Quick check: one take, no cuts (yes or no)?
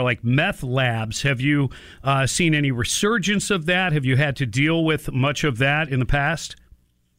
yes